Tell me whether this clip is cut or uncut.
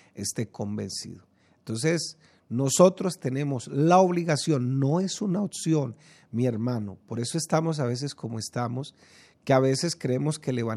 uncut